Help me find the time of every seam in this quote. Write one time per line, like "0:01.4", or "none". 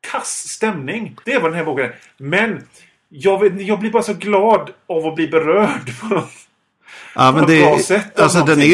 0:01.2